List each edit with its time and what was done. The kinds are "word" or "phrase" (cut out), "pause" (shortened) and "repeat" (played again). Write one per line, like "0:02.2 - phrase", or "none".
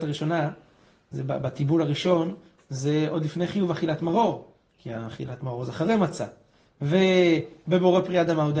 none